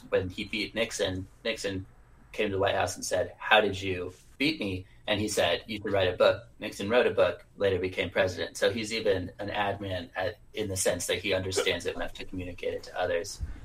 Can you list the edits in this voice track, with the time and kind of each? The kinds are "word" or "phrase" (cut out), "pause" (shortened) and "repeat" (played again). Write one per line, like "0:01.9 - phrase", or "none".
0:11.9 - word